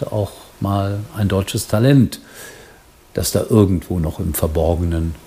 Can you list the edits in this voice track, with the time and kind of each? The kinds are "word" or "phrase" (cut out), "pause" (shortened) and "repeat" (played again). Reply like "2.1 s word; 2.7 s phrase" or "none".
none